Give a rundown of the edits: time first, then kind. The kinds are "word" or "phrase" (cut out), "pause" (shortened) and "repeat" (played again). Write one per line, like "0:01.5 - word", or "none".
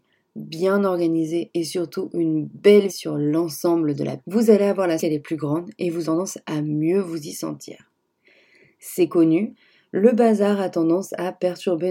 0:02.9 - word
0:04.2 - word
0:05.0 - word
0:06.0 - word